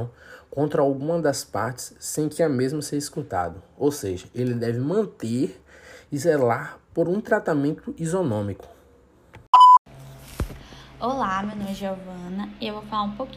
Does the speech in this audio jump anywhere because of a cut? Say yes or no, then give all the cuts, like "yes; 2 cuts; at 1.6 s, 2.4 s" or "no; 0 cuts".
no; 0 cuts